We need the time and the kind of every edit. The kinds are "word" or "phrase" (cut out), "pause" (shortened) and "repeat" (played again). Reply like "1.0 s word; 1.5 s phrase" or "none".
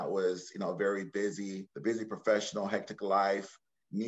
1.7 s pause